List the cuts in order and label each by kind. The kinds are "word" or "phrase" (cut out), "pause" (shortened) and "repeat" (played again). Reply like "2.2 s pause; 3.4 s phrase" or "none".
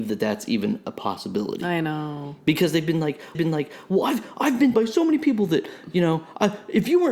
3.3 s repeat; 4.7 s word

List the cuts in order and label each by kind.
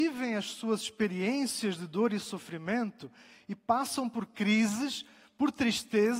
none

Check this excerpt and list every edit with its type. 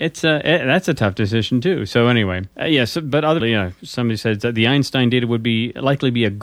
2.5 s pause; 3.4 s word

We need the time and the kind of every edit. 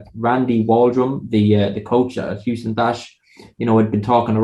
none

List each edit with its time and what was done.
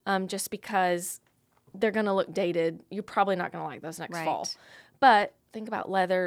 none

